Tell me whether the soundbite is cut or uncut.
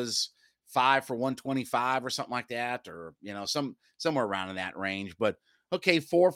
uncut